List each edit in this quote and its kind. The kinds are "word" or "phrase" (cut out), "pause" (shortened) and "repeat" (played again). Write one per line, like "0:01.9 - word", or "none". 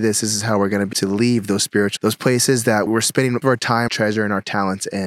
0:00.9 - word
0:02.0 - word
0:02.9 - word
0:03.4 - word
0:03.9 - word